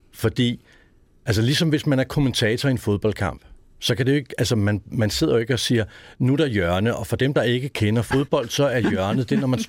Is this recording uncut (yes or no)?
yes